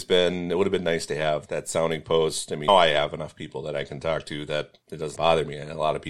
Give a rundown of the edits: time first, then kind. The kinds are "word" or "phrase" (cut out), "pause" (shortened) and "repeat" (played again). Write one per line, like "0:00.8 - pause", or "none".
0:01.5 - word
0:02.7 - word
0:04.8 - pause
0:05.2 - word